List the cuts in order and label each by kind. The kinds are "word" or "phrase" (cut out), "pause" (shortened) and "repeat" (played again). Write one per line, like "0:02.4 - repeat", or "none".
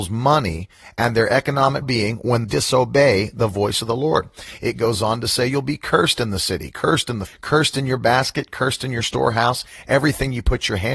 0:01.8 - word
0:02.4 - word
0:07.3 - word